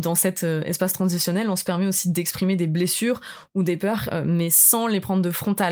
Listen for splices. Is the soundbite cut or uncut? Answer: uncut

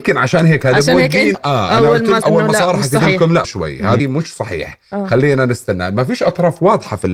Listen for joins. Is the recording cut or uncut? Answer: cut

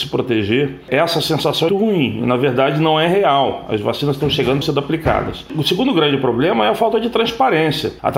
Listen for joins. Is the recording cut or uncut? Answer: cut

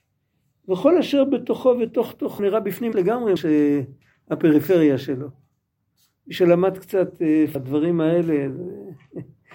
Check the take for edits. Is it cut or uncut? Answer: cut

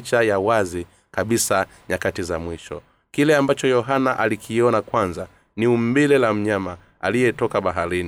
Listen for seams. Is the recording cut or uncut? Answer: uncut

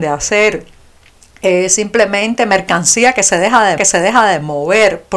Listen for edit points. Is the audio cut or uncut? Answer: cut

